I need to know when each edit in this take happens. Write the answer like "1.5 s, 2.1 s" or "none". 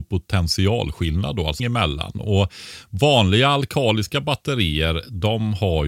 1.6 s